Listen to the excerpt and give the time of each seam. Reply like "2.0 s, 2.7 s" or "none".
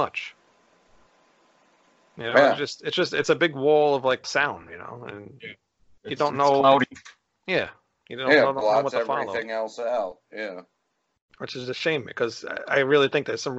4.2 s